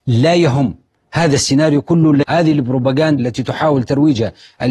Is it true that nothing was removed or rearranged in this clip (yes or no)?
no